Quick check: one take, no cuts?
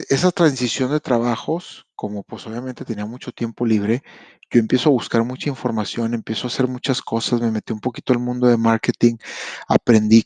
yes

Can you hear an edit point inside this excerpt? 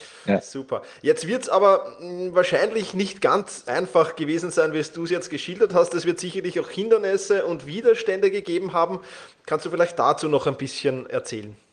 yes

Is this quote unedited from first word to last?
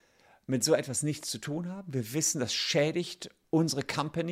yes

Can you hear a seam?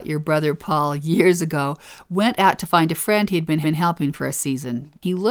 yes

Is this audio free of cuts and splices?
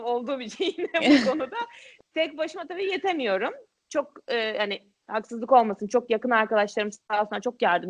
yes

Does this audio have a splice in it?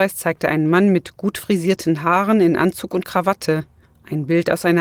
no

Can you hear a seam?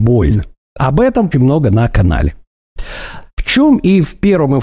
yes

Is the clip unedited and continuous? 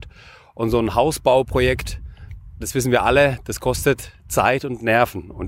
no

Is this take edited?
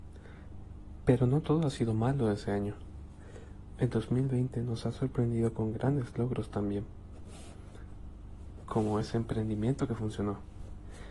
no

